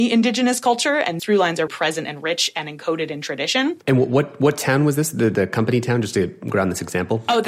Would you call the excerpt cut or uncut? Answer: cut